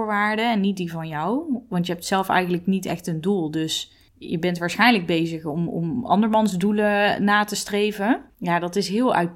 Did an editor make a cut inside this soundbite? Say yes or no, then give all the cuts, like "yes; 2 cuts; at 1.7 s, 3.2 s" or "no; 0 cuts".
yes; 2 cuts; at 4.1 s, 8.3 s